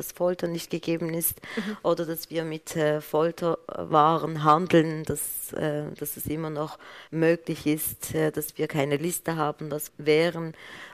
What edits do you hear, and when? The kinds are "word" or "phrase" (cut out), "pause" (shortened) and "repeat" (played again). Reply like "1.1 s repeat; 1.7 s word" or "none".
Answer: 7.1 s pause; 9.9 s phrase